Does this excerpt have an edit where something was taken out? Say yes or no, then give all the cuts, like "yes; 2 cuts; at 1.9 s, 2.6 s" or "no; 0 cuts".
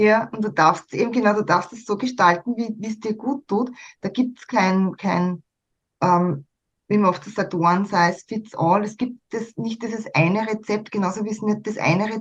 no; 0 cuts